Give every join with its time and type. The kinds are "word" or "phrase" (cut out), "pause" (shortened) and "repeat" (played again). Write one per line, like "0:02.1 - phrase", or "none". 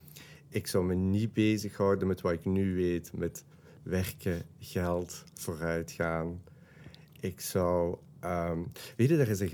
none